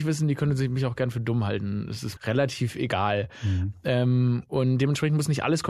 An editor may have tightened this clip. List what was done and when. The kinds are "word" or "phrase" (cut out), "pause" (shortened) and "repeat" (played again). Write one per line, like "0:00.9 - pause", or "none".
0:02.2 - word